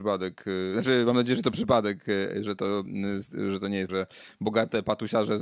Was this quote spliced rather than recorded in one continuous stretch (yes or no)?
yes